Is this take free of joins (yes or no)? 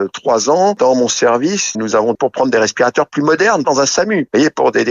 no